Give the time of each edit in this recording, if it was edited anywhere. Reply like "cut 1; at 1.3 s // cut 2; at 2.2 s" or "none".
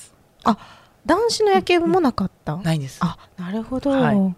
cut 1; at 3.3 s